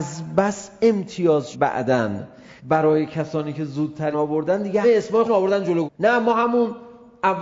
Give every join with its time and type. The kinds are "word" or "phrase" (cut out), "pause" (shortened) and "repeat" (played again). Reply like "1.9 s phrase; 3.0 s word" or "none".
1.5 s word; 2.6 s pause; 4.1 s word; 4.8 s word; 5.2 s word; 5.8 s word